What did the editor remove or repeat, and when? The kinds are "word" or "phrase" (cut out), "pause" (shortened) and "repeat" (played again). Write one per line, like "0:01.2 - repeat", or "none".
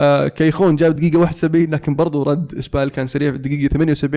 none

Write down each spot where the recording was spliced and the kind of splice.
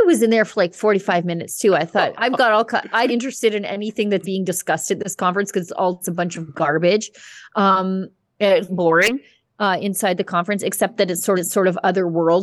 0:02.1 - word
0:03.1 - phrase
0:04.2 - word
0:06.0 - word
0:08.7 - word
0:11.3 - repeat

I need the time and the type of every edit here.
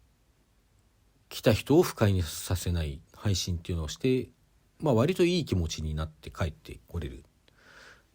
0:03.0 - pause

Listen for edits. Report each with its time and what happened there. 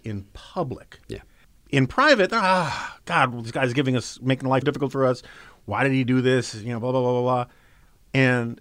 0:01.4 - pause
0:04.6 - word

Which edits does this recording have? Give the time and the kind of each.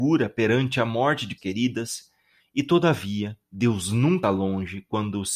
0:01.4 - word
0:03.4 - pause
0:04.2 - word

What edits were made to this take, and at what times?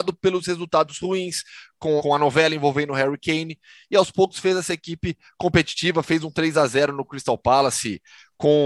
0:02.0 - word

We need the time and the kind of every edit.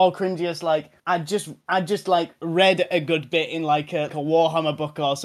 0:01.0 - pause
0:04.1 - word

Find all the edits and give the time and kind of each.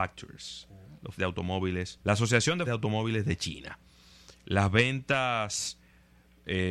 0:01.2 - word
0:02.0 - pause
0:02.7 - word

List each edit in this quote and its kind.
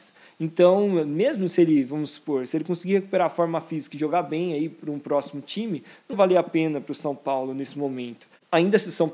0:06.1 - word

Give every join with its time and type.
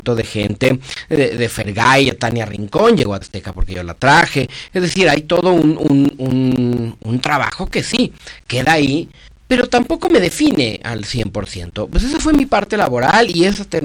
0:03.2 - word
0:09.3 - pause

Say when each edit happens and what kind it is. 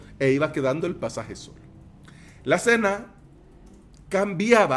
none

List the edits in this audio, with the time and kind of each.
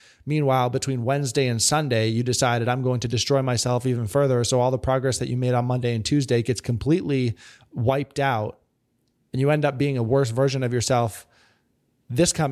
none

